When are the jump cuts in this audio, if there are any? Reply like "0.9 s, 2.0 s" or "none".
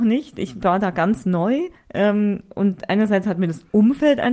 1.7 s